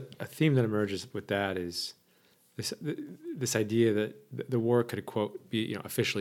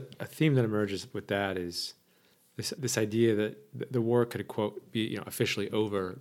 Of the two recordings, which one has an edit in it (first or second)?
second